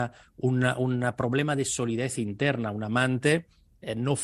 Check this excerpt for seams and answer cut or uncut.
uncut